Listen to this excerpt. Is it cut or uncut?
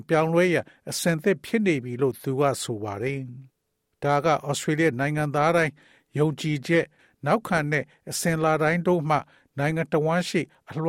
uncut